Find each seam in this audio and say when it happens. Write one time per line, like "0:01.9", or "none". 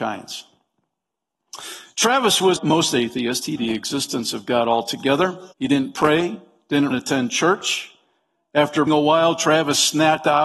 0:02.6
0:03.6
0:05.5
0:06.9
0:08.9